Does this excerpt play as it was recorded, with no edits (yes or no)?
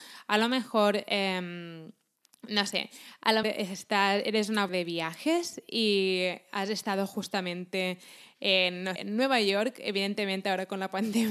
no